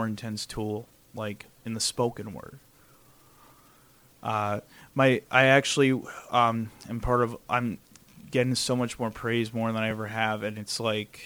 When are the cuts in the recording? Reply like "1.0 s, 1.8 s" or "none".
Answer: none